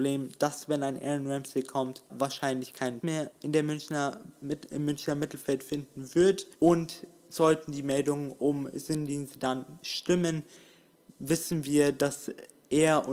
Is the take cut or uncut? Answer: cut